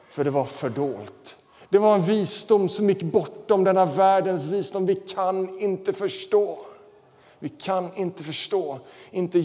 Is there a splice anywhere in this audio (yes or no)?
no